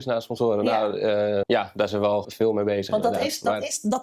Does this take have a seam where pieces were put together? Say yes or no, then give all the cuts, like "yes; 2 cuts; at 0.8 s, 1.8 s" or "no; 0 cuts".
yes; 3 cuts; at 1.4 s, 1.9 s, 2.2 s